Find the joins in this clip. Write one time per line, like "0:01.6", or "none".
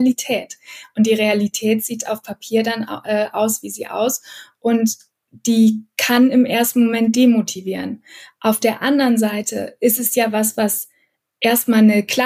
none